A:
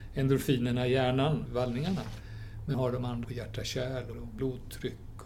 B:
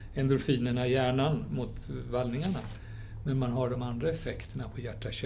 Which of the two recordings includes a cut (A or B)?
A